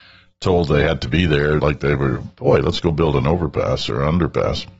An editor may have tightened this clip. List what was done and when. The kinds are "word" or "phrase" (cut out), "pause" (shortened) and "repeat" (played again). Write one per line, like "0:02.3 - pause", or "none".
0:01.6 - phrase